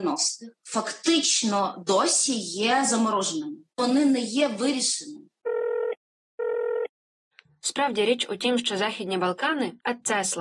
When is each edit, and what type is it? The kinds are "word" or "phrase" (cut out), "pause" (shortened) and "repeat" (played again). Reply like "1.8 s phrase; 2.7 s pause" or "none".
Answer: none